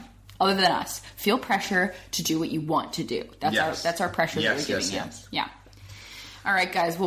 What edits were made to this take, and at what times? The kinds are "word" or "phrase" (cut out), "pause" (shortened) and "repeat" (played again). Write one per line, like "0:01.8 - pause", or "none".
none

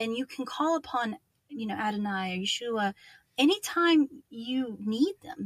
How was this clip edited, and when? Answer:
none

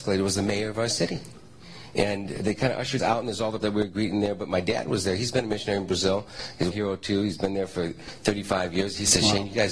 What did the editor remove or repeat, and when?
0:02.4 - word
0:03.0 - word
0:03.6 - word
0:06.7 - word

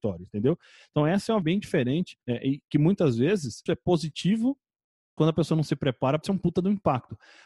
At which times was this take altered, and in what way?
0:01.4 - word
0:02.2 - pause
0:03.7 - word
0:05.2 - word
0:06.2 - word

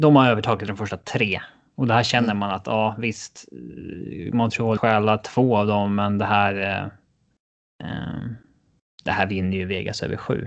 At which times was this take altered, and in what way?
0:04.8 - word

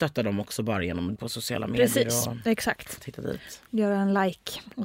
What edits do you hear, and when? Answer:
0:01.2 - word
0:03.0 - word
0:03.7 - pause

